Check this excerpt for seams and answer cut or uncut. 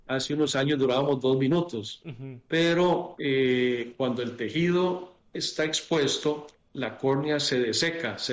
uncut